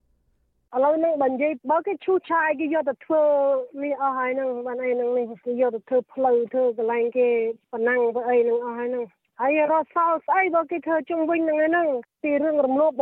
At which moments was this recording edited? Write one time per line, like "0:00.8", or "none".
none

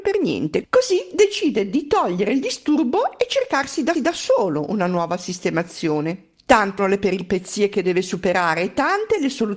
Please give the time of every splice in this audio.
0:03.9
0:06.8

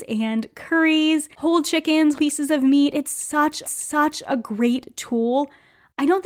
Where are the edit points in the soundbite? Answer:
0:01.3
0:02.1
0:03.6

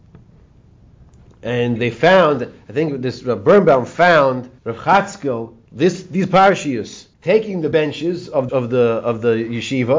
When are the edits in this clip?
0:01.8
0:04.6
0:05.6
0:07.1
0:07.7
0:08.5

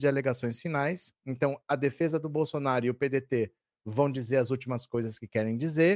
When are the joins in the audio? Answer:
none

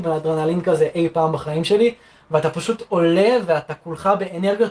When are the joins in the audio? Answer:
none

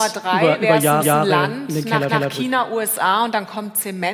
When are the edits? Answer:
0:01.0
0:02.1

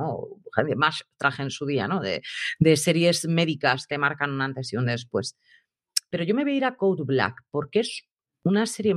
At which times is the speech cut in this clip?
0:03.9

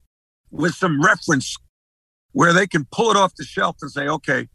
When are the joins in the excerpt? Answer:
none

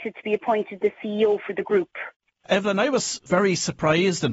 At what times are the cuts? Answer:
none

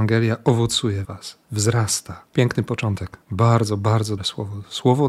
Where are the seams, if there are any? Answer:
0:01.0
0:02.3
0:03.2
0:04.2

